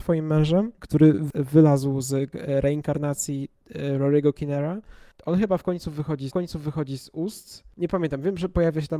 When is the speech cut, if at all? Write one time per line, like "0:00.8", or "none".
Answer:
0:02.3
0:06.3

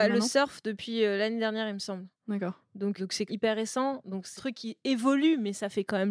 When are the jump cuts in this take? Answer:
0:03.0
0:03.3
0:04.4

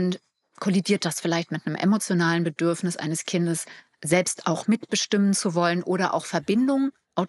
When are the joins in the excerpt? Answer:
none

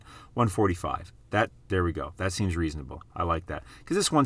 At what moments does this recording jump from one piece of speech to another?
0:01.6

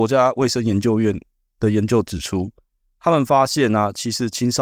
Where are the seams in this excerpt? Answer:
none

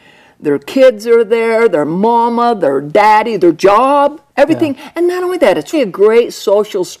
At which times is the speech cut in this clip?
0:04.3
0:05.7

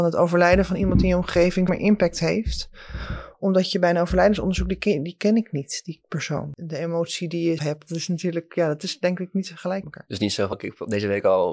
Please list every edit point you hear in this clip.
0:01.7
0:07.6
0:09.8
0:10.5

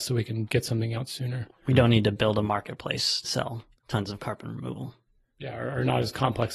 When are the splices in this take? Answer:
0:03.2

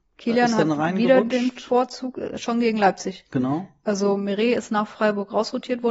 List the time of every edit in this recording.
none

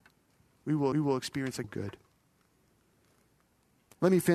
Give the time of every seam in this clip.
0:00.9
0:01.6

